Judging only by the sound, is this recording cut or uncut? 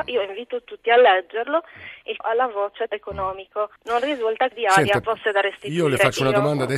cut